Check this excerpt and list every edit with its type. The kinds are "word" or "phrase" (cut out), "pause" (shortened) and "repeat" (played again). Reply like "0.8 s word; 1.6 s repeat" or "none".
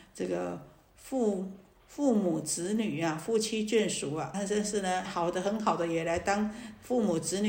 4.3 s word; 5.0 s word

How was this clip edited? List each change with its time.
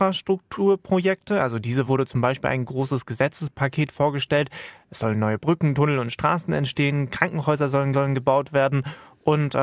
1.9 s word; 7.9 s repeat

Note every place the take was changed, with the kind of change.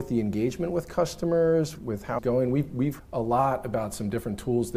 1.7 s word; 2.2 s word; 3.0 s word

